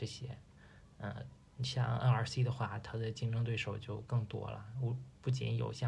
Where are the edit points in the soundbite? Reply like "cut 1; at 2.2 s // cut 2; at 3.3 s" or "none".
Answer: none